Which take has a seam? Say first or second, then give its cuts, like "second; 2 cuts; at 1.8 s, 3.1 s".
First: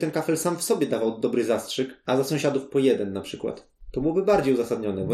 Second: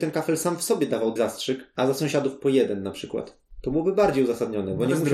second; 1 cut; at 1.2 s